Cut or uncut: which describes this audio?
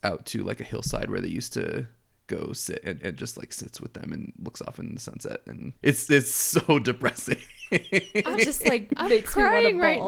cut